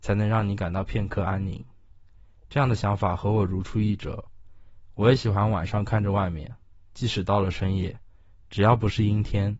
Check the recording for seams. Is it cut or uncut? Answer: uncut